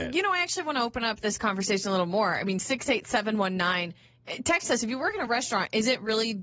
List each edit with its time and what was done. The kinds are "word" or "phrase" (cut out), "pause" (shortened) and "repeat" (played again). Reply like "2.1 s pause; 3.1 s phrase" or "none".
none